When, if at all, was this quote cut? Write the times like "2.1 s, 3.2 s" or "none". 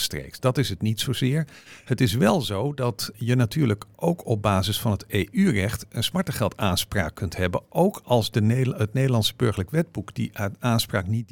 3.1 s